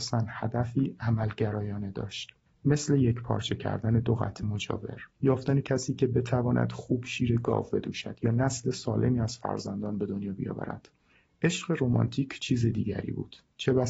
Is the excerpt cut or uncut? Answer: cut